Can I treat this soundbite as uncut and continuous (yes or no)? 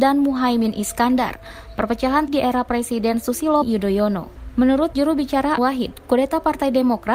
no